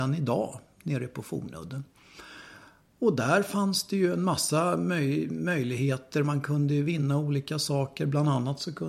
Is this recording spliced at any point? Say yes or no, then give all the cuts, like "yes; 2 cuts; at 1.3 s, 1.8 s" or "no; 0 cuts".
no; 0 cuts